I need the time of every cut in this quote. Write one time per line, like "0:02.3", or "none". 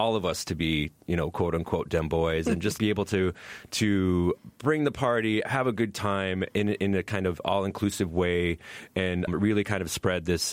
0:02.8
0:09.3

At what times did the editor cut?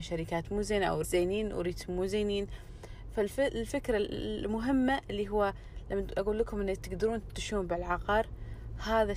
0:01.0

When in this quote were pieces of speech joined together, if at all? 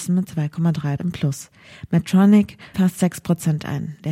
0:01.0
0:02.7

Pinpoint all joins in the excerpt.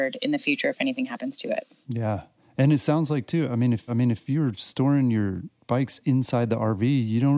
0:03.9

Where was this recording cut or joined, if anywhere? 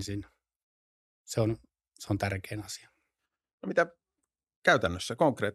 none

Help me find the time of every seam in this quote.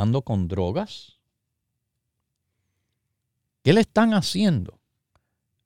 none

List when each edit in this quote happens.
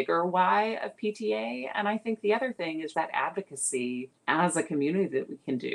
0:02.9
0:04.2

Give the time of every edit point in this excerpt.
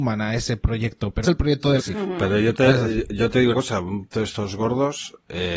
0:01.2
0:01.8
0:03.5
0:04.1

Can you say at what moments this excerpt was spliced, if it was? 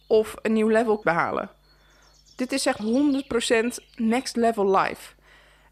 0:01.0
0:02.8

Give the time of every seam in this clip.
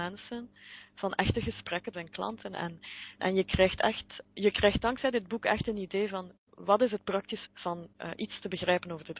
0:01.9
0:03.2
0:04.2
0:06.4
0:07.5
0:07.9

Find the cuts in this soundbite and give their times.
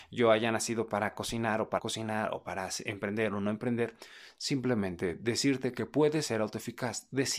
0:01.8

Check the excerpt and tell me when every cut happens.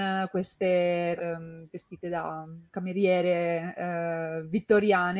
0:01.2
0:02.7

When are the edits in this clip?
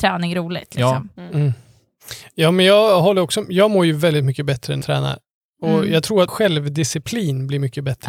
0:04.8
0:06.3

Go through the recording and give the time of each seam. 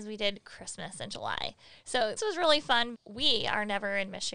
0:02.2
0:02.9

